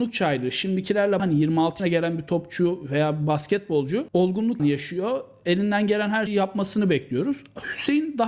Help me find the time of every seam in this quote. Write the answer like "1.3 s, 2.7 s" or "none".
1.2 s, 1.8 s, 4.6 s, 6.3 s